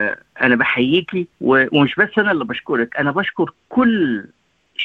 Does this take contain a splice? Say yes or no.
yes